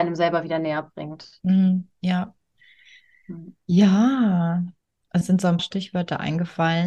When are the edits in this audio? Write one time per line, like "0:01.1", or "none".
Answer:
0:05.2
0:05.6